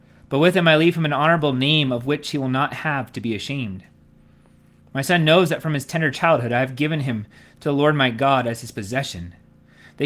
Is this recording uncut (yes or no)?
yes